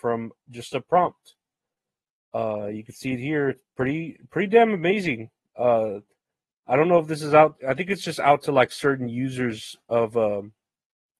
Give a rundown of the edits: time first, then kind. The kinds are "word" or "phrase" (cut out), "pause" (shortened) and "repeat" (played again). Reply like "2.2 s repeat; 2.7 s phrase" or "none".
none